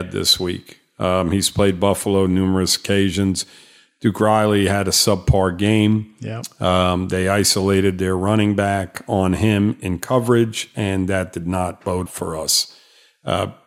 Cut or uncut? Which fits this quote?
cut